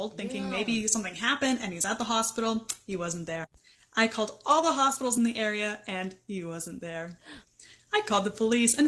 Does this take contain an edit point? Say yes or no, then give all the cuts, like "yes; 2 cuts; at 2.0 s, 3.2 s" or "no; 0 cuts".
no; 0 cuts